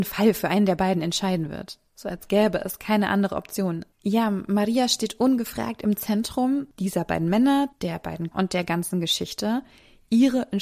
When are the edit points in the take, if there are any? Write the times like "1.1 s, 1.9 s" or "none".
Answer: 3.9 s, 7.7 s, 8.3 s